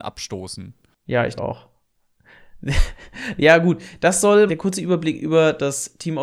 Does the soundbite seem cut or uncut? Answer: cut